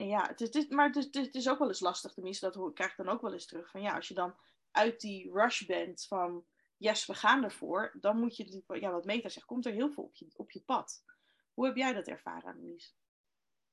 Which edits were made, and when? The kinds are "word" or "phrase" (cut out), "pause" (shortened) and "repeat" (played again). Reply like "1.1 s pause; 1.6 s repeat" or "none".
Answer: none

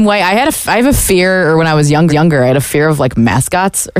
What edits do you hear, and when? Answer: 2.1 s repeat

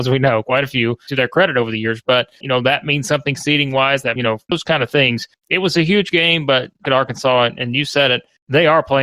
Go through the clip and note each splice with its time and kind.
2.4 s word; 4.2 s phrase; 4.5 s phrase; 6.9 s phrase

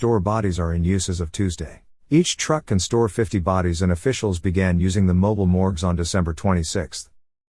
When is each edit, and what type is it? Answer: 2.0 s pause

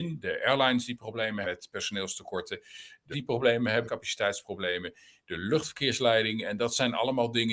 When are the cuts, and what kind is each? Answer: 1.4 s word; 3.1 s word; 3.9 s word

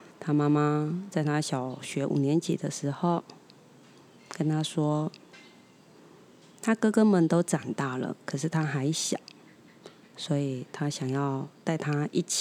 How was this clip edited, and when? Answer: none

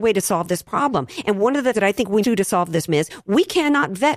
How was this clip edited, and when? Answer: 1.7 s word; 2.2 s word; 2.9 s word

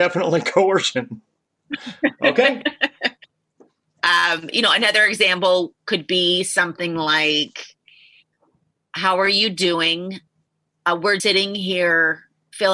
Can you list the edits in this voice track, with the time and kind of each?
11.2 s word

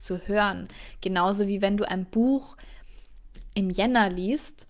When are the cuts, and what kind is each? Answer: none

